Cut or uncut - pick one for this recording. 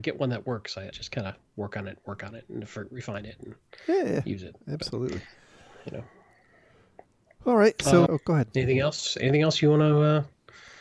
cut